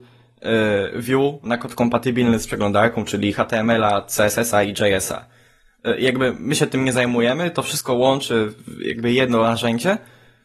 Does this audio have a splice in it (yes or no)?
yes